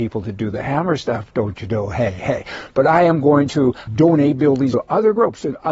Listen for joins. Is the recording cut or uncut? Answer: cut